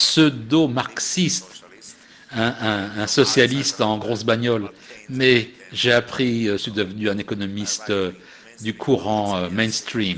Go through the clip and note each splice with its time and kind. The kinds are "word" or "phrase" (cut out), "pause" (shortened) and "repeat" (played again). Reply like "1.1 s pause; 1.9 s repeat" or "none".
6.6 s phrase